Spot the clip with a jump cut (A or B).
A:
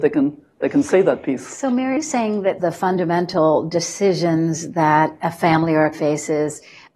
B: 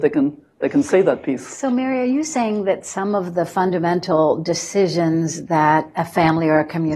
A